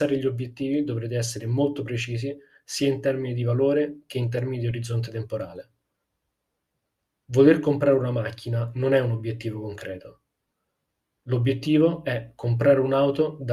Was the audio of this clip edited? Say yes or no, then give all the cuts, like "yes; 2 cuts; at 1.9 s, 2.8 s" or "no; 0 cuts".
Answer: no; 0 cuts